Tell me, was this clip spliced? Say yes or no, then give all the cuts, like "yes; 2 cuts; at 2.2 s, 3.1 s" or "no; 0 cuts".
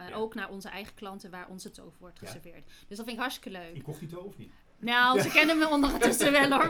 no; 0 cuts